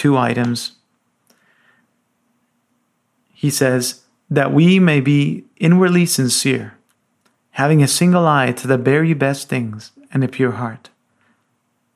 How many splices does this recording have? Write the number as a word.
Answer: zero